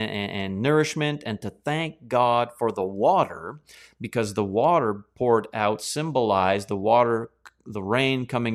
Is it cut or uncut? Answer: uncut